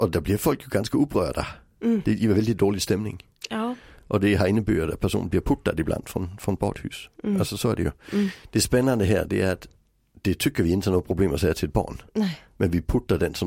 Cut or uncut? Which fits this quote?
cut